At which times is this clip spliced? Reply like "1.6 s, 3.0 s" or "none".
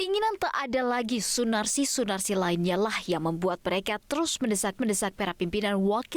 4.8 s